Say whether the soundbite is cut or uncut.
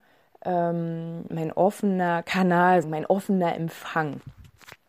cut